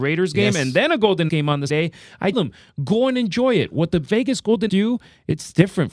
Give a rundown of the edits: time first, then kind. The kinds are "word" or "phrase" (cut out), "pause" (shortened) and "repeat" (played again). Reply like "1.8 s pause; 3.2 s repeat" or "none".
1.3 s word; 1.7 s word; 2.3 s word; 4.7 s word

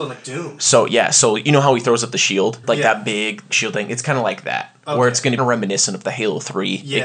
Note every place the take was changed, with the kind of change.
2.6 s phrase; 3.5 s word; 5.4 s phrase

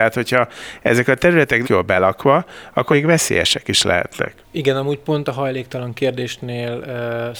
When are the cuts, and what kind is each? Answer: 1.6 s word; 2.9 s word

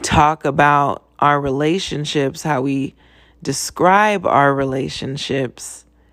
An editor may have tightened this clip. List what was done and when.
none

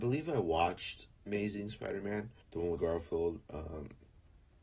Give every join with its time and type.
1.3 s word; 2.4 s pause; 2.8 s word

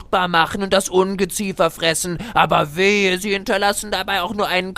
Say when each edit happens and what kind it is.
none

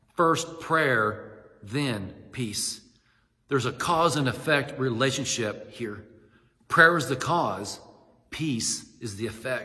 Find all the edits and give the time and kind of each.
none

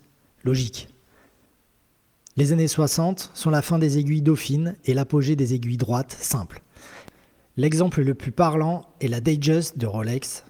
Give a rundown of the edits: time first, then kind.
none

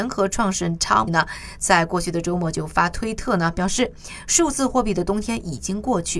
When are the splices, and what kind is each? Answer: 1.1 s word

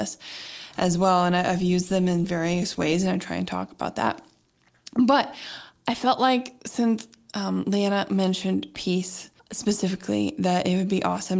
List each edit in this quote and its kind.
9.4 s pause

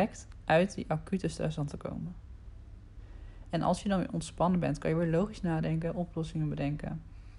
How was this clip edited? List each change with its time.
none

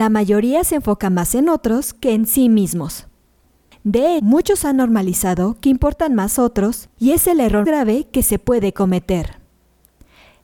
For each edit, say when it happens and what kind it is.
4.2 s word; 7.6 s word

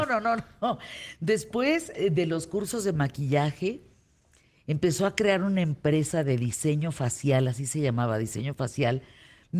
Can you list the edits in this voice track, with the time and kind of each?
none

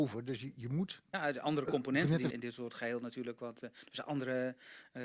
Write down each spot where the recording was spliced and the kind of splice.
1.1 s pause; 2.3 s phrase

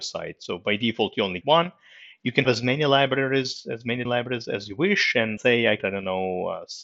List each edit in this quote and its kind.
1.4 s word; 2.4 s word; 4.0 s word; 5.4 s word; 5.8 s word

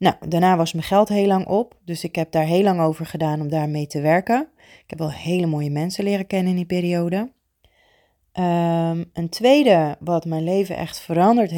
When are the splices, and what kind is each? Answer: none

